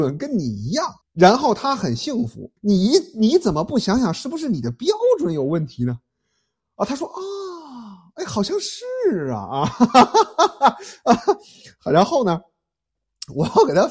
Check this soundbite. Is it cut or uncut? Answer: cut